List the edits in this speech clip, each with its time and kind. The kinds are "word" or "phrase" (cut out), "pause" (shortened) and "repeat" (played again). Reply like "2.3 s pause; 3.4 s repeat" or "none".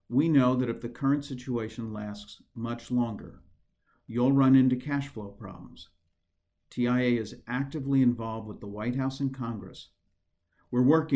none